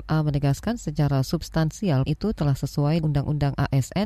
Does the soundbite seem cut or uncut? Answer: cut